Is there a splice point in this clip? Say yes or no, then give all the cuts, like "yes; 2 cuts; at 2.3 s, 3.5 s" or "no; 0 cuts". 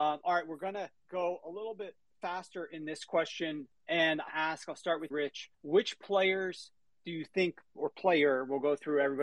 yes; 5 cuts; at 1.0 s, 4.3 s, 5.1 s, 5.5 s, 6.9 s